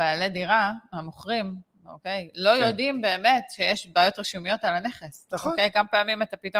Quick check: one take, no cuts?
yes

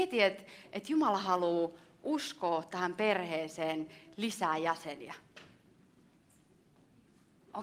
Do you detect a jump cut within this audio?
no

